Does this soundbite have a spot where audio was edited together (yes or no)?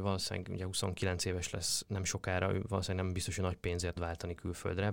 yes